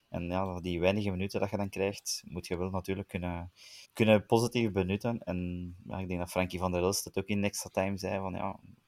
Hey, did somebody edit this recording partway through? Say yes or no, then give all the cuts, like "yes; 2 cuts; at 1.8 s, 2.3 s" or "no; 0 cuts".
yes; 1 cut; at 3.8 s